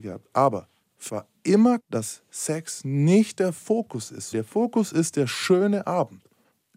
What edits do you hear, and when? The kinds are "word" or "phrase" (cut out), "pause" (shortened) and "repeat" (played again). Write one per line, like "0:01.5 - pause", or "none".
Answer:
0:01.1 - word
0:01.8 - word
0:04.3 - word